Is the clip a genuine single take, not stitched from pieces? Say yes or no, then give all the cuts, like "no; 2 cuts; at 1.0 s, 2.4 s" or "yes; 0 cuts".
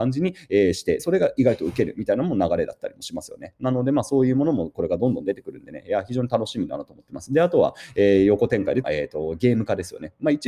no; 2 cuts; at 1.0 s, 8.8 s